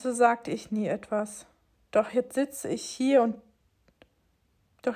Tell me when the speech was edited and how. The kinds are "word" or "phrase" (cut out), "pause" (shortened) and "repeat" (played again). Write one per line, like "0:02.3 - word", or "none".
none